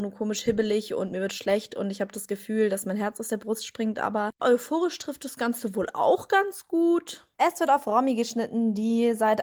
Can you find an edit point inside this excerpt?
no; 0 cuts

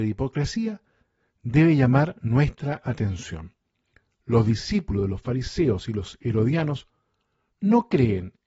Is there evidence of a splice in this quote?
no; 0 cuts

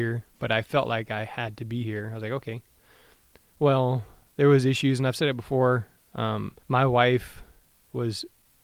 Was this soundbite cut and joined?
yes; 1 cut; at 6.6 s

